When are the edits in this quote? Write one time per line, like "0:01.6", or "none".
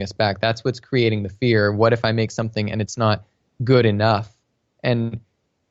none